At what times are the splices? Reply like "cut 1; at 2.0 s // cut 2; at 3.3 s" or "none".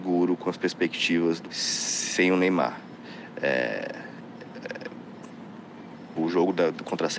cut 1; at 1.4 s // cut 2; at 6.2 s